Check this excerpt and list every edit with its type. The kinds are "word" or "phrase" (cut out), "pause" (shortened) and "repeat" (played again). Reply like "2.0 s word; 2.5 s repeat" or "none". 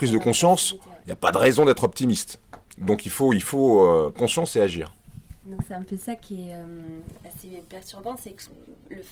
4.2 s word